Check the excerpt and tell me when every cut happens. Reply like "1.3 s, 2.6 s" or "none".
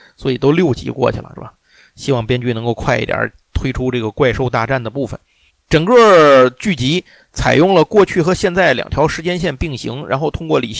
1.4 s, 5.5 s